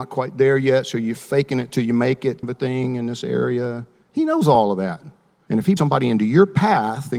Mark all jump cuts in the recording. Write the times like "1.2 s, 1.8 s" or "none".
2.4 s, 5.8 s